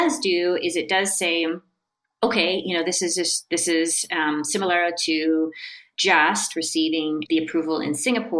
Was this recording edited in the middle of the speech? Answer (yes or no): no